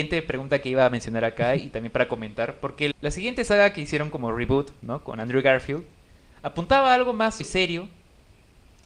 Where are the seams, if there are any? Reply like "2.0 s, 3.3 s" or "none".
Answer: 2.9 s, 7.4 s